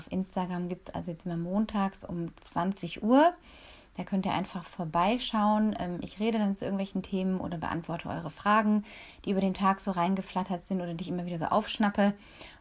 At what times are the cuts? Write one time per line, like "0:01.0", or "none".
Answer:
none